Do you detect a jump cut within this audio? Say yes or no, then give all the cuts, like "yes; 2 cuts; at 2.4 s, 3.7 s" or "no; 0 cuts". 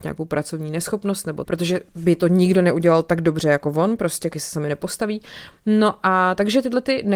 yes; 2 cuts; at 1.4 s, 4.3 s